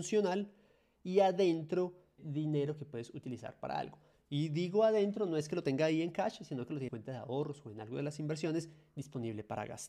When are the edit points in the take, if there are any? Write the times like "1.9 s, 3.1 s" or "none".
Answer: 2.2 s, 6.9 s